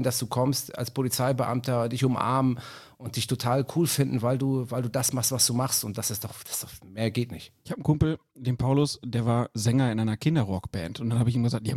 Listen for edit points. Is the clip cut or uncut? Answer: cut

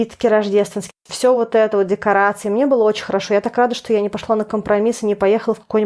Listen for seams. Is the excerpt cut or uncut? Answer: uncut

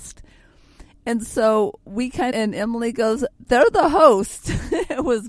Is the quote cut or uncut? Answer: cut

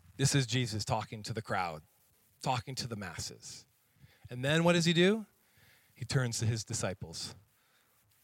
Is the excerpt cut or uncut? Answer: uncut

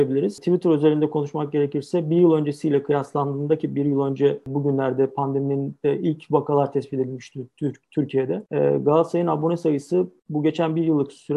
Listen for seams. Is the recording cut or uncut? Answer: cut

